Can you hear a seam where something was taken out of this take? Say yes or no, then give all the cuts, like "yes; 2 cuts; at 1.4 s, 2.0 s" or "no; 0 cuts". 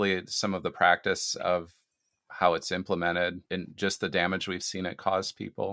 yes; 1 cut; at 3.5 s